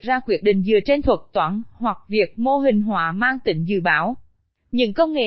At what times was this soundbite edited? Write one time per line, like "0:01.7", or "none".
none